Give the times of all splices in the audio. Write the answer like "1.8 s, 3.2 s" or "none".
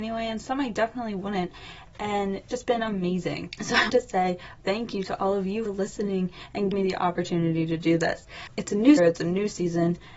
2.5 s, 3.9 s, 4.6 s, 5.7 s, 6.7 s, 9.0 s